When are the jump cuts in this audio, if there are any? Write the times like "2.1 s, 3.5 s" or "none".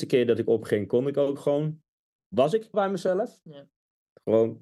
2.7 s

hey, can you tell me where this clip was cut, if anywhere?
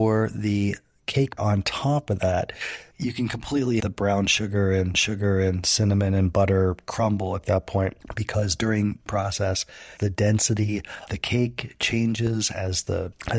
1.4 s, 2.9 s, 3.8 s, 4.9 s, 9.1 s, 10.0 s, 11.1 s

